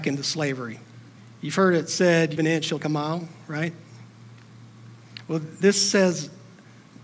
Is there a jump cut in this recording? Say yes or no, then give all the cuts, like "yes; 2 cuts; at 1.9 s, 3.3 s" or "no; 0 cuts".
yes; 3 cuts; at 1.2 s, 2.4 s, 2.8 s